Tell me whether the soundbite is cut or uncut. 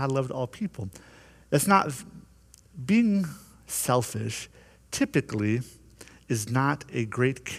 uncut